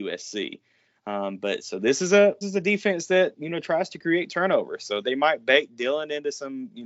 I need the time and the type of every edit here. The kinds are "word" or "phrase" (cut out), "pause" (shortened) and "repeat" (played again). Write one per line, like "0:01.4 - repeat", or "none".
0:02.4 - word
0:05.0 - word